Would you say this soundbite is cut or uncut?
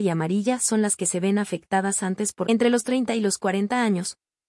cut